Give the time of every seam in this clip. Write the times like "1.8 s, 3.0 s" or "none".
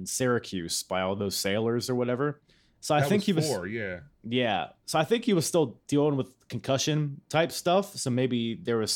none